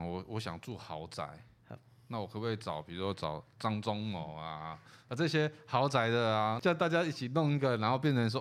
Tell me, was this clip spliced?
no; 0 cuts

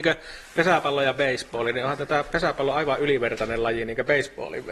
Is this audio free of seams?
yes; 0 cuts

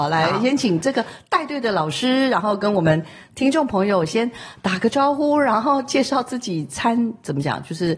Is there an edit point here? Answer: no; 0 cuts

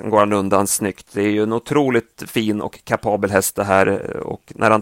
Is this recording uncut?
yes; 0 cuts

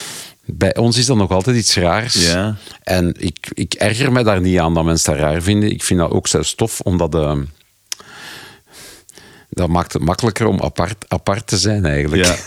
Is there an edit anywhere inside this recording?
no; 0 cuts

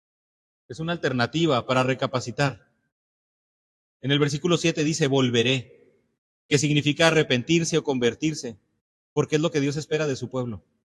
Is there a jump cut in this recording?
no; 0 cuts

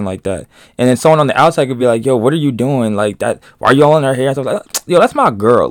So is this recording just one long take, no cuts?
yes; 0 cuts

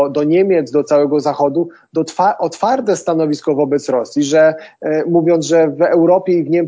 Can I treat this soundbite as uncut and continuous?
yes; 0 cuts

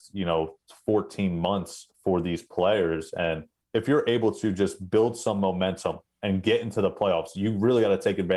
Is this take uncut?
no; 2 cuts; at 1.9 s, 3.6 s

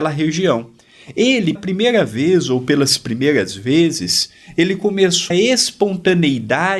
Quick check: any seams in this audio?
yes; 2 cuts; at 1.6 s, 5.3 s

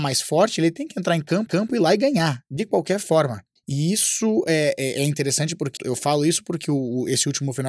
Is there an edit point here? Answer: yes; 3 cuts; at 1.5 s, 3.6 s, 5.8 s

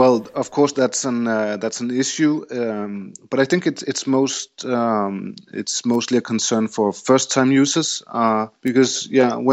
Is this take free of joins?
no; 1 cut; at 8.5 s

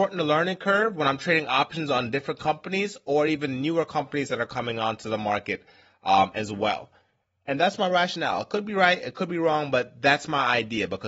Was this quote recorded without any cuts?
yes; 0 cuts

